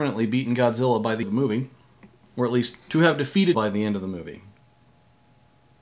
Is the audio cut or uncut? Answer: cut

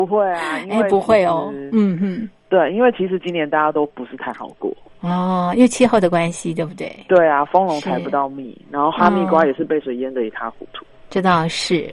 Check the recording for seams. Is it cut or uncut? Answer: uncut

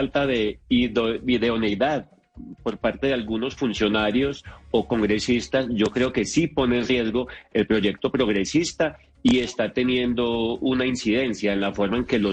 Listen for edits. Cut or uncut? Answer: uncut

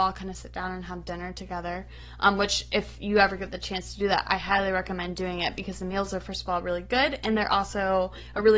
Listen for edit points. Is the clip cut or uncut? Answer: uncut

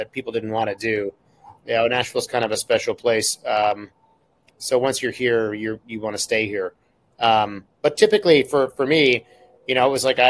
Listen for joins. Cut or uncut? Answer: uncut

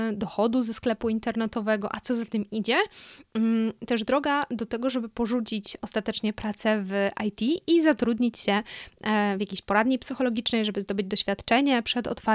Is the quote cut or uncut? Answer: uncut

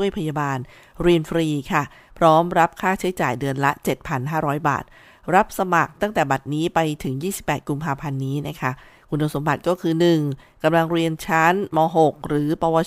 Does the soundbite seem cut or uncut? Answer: uncut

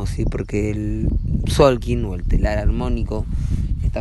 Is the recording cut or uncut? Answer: uncut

